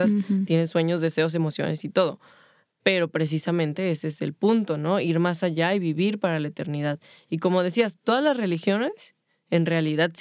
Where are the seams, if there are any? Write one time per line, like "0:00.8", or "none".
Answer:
none